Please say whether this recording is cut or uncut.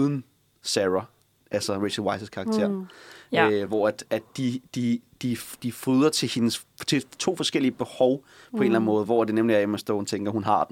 uncut